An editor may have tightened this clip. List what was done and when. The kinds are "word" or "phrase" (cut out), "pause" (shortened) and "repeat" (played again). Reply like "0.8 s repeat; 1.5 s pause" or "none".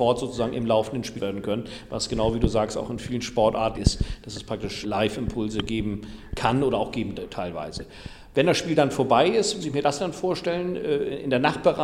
1.2 s word; 3.7 s phrase; 4.8 s word; 7.2 s word; 9.6 s word